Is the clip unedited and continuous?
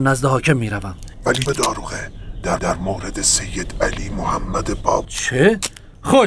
no; 3 cuts; at 1.5 s, 2.6 s, 5.0 s

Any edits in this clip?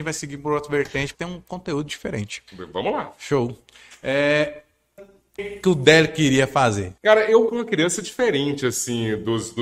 yes; 6 cuts; at 1.1 s, 2.5 s, 5.0 s, 5.4 s, 7.0 s, 7.5 s

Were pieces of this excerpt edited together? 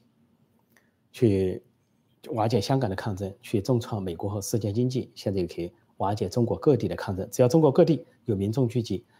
no; 0 cuts

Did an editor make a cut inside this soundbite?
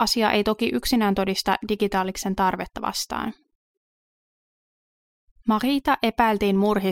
no; 0 cuts

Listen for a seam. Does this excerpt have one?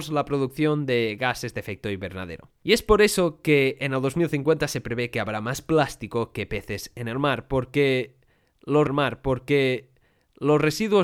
yes; 1 cut; at 8.9 s

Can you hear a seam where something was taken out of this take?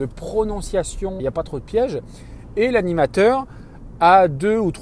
yes; 1 cut; at 1.2 s

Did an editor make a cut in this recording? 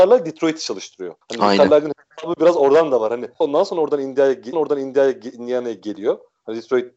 yes; 3 cuts; at 1.2 s, 3.4 s, 4.5 s

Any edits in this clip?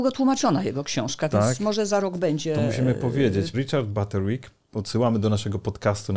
yes; 1 cut; at 3.5 s

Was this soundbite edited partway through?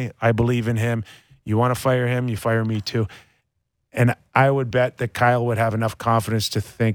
no; 0 cuts

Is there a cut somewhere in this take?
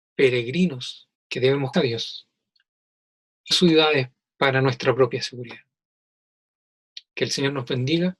yes; 3 cuts; at 1.1 s, 1.7 s, 3.5 s

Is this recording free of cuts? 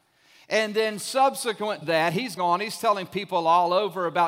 no; 2 cuts; at 1.8 s, 2.4 s

